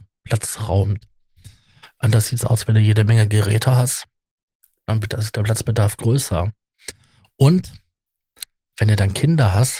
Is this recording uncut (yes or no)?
yes